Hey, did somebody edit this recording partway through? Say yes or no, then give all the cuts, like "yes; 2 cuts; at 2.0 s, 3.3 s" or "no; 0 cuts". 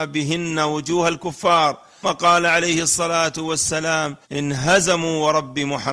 yes; 2 cuts; at 2.0 s, 4.2 s